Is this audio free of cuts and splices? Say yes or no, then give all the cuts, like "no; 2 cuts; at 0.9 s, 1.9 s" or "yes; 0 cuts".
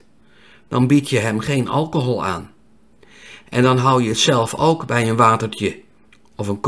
yes; 0 cuts